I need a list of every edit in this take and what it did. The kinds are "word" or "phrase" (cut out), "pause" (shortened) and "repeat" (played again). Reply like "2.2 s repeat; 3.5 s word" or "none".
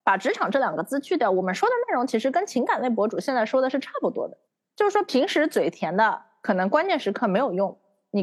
4.5 s pause